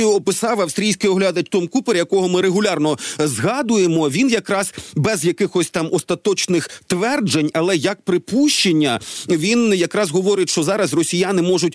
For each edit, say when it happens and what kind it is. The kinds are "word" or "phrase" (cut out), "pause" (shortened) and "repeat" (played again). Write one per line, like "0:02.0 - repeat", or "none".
0:02.4 - word